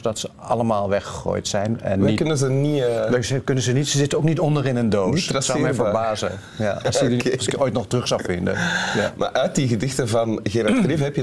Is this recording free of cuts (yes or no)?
yes